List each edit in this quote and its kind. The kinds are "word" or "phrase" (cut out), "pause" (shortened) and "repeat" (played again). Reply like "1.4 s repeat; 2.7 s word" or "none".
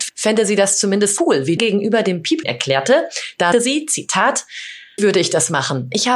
1.2 s word; 1.6 s word; 2.4 s word; 3.5 s word; 5.0 s word